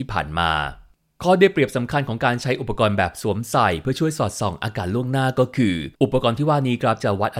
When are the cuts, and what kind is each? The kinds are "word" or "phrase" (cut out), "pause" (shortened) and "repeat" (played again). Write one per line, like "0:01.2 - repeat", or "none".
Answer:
0:05.9 - pause